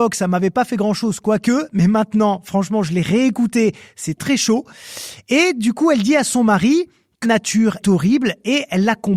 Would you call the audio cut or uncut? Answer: cut